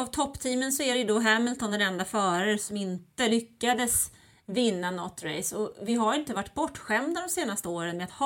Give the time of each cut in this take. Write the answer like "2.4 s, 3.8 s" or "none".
none